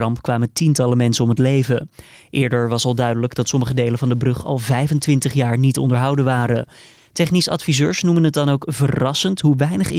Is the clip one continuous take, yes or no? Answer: yes